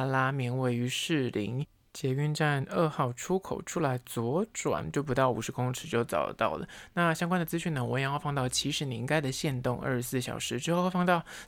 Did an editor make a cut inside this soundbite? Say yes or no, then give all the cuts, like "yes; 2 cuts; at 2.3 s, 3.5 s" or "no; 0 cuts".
no; 0 cuts